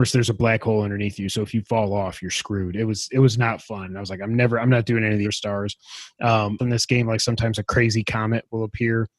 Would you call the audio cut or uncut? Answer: cut